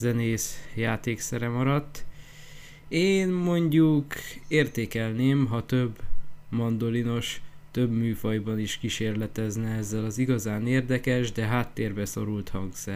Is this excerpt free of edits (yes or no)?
yes